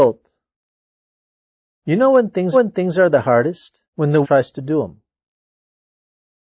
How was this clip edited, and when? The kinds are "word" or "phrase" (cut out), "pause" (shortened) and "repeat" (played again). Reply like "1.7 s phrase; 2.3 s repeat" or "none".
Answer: 2.5 s repeat; 3.8 s pause; 4.2 s phrase

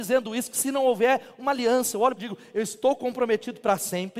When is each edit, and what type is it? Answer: 2.2 s phrase

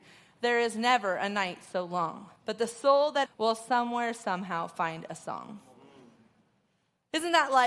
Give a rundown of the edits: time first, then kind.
2.4 s pause; 3.3 s phrase

